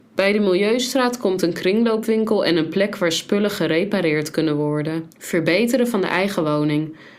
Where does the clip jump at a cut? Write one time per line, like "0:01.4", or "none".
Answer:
0:05.1